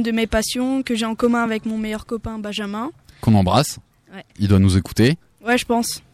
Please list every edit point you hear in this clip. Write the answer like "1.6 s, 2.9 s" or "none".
none